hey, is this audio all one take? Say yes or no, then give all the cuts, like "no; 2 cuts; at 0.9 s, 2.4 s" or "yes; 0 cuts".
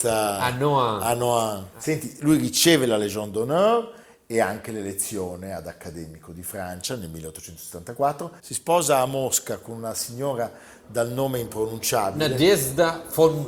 yes; 0 cuts